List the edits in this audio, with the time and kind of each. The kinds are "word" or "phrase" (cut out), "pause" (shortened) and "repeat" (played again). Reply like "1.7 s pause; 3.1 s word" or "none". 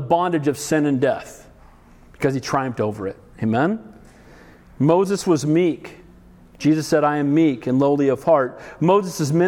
none